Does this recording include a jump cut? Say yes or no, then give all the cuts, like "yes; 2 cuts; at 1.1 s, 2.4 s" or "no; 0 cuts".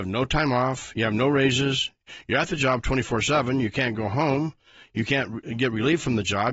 no; 0 cuts